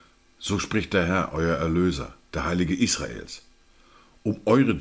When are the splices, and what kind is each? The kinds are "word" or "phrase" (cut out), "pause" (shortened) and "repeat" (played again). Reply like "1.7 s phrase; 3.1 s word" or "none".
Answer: none